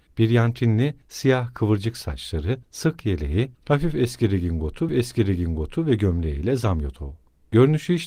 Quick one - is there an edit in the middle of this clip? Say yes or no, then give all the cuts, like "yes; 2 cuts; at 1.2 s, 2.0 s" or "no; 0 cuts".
yes; 1 cut; at 4.9 s